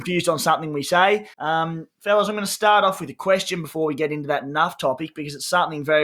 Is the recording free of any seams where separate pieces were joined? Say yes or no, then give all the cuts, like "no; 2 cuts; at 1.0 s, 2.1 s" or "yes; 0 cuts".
no; 1 cut; at 1.3 s